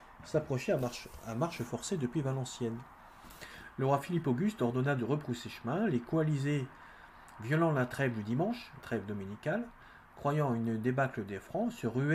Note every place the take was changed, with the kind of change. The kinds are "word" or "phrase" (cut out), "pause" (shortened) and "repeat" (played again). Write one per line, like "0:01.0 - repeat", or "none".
0:08.8 - word
0:10.0 - pause